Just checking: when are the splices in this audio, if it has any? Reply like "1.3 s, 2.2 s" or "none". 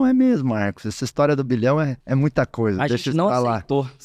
2.0 s